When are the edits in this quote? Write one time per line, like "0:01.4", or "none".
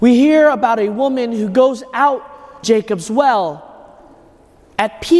0:02.6